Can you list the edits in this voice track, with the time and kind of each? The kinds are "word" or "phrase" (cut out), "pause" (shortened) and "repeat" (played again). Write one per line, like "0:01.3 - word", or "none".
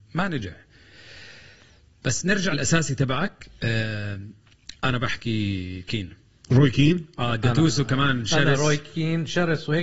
0:02.5 - word
0:04.8 - pause